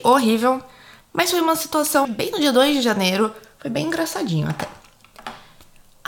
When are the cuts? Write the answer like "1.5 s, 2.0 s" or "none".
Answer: 2.0 s